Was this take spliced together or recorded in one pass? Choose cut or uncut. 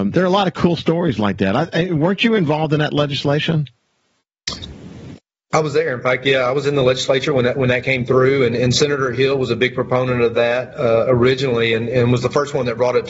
uncut